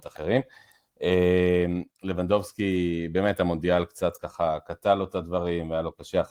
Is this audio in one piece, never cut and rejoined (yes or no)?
yes